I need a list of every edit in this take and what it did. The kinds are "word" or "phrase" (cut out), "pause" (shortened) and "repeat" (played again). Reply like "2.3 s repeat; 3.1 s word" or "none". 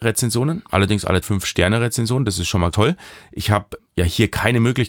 1.2 s word; 2.7 s word; 3.8 s word